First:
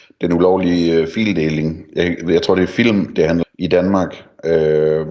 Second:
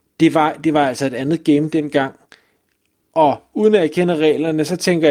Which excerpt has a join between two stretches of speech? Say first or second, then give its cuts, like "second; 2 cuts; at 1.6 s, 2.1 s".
first; 1 cut; at 3.4 s